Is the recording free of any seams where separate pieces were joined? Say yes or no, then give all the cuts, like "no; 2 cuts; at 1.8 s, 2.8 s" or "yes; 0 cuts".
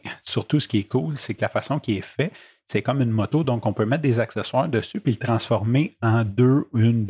yes; 0 cuts